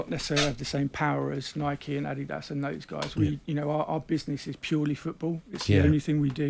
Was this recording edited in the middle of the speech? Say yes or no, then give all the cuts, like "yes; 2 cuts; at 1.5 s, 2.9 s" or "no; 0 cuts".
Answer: no; 0 cuts